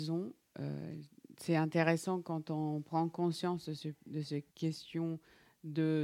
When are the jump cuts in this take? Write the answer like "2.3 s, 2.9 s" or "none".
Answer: 4.5 s